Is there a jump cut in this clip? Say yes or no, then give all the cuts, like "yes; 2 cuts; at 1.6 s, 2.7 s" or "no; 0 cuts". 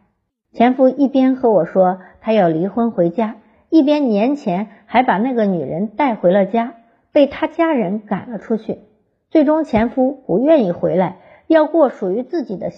no; 0 cuts